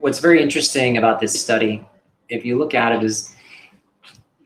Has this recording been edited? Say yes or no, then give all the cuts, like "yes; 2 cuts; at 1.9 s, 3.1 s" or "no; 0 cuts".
yes; 1 cut; at 1.3 s